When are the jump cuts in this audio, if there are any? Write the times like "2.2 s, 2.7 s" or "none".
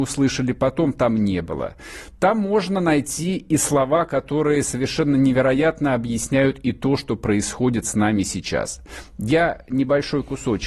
none